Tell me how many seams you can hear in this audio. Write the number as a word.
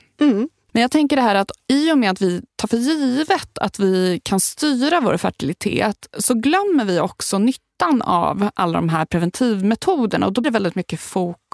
two